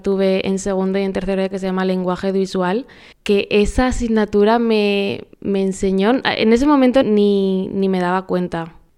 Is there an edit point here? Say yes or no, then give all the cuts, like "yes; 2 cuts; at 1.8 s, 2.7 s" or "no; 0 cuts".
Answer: yes; 4 cuts; at 1.5 s, 3.1 s, 5.3 s, 7.0 s